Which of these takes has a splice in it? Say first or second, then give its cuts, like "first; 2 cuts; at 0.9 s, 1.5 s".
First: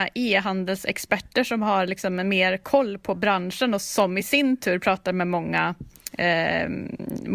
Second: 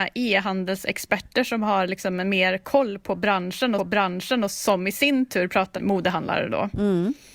second; 2 cuts; at 3.8 s, 5.7 s